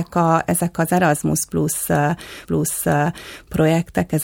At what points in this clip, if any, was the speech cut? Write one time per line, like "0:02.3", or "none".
0:02.4